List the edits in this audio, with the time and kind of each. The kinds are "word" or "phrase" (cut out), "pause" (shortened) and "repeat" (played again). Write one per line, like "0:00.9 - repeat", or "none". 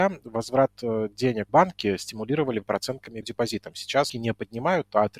0:01.5 - word
0:02.6 - word
0:03.2 - word
0:04.1 - word